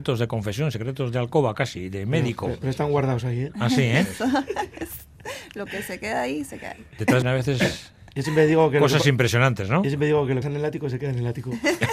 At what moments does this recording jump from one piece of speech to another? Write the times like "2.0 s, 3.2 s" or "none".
7.2 s, 10.4 s